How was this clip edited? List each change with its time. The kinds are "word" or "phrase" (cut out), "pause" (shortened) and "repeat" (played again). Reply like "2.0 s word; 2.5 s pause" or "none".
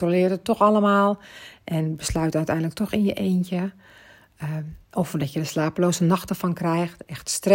none